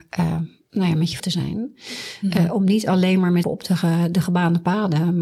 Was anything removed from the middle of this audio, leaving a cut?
yes; 2 cuts; at 1.2 s, 3.4 s

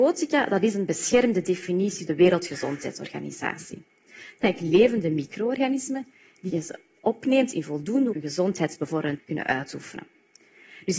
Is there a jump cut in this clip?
yes; 5 cuts; at 2.1 s, 4.4 s, 6.5 s, 8.1 s, 9.2 s

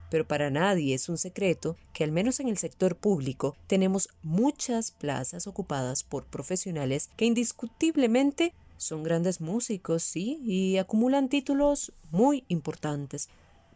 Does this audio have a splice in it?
no; 0 cuts

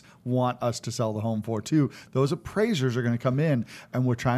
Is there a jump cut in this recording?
no; 0 cuts

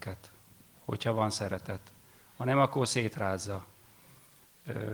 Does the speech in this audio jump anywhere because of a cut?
no; 0 cuts

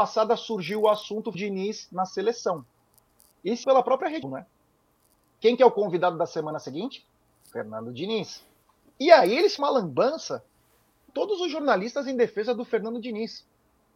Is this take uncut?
no; 6 cuts; at 1.3 s, 3.6 s, 4.2 s, 8.6 s, 9.6 s, 11.1 s

